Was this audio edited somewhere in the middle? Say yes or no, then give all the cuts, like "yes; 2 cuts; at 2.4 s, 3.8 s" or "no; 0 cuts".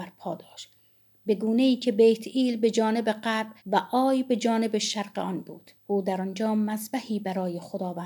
yes; 2 cuts; at 3.6 s, 5.8 s